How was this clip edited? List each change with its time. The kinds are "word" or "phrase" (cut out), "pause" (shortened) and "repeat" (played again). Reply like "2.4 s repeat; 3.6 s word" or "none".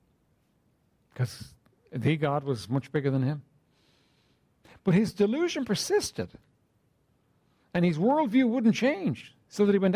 none